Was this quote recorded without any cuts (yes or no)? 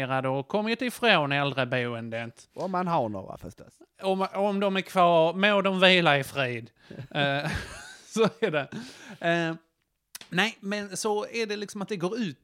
yes